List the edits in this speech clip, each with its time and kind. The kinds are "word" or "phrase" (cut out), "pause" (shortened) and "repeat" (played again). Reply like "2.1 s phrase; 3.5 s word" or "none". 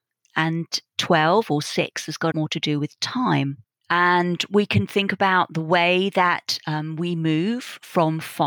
2.3 s phrase; 3.6 s pause